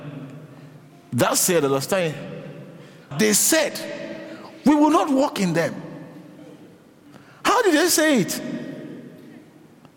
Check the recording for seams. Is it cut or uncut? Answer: cut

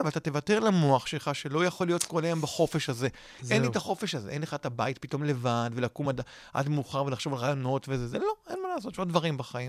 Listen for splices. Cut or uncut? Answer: uncut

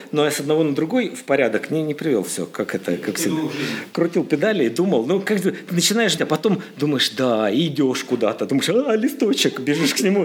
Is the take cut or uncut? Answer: cut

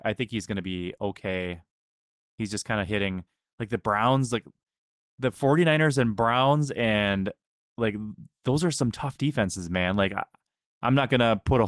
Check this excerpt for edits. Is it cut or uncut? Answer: uncut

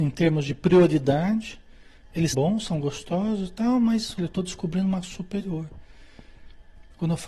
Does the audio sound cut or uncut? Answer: cut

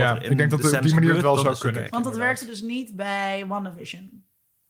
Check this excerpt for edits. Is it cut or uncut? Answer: cut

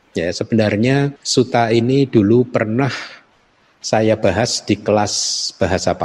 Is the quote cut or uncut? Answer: cut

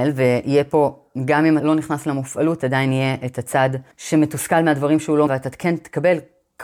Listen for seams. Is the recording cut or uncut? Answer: cut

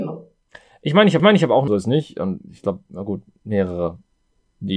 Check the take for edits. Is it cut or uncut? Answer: cut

